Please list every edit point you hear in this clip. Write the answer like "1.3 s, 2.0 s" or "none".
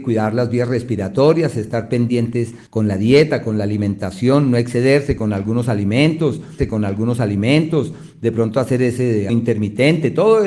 2.7 s, 6.6 s, 9.3 s

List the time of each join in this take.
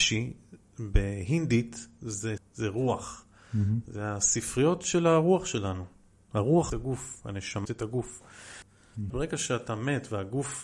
2.4 s, 6.7 s, 7.6 s, 9.1 s

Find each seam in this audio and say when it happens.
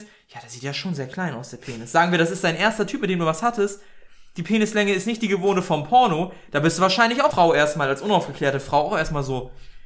7.3 s

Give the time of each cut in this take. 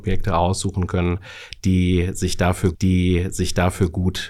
2.7 s

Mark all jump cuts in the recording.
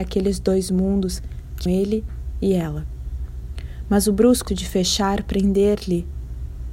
1.7 s, 4.5 s

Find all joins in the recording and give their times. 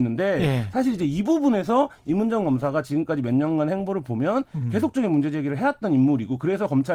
none

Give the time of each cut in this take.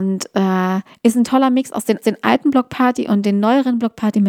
2.0 s

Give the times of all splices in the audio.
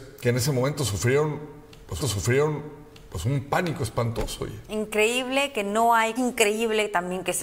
2.0 s, 6.2 s

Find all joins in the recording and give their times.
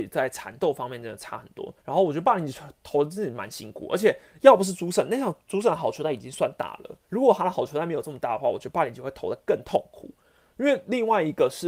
1.8 s, 7.0 s

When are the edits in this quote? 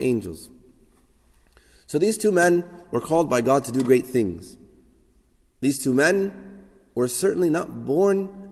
none

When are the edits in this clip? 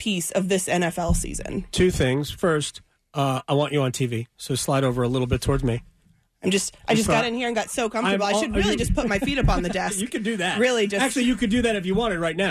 none

